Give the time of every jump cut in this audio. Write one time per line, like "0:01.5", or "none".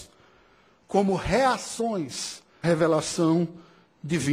0:02.6